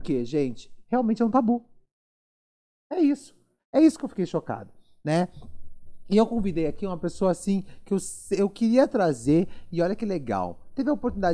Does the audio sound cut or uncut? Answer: uncut